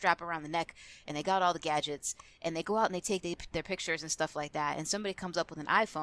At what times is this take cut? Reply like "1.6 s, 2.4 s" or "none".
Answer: none